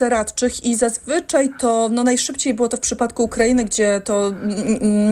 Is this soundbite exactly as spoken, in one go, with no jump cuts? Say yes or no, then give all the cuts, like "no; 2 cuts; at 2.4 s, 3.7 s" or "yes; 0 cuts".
yes; 0 cuts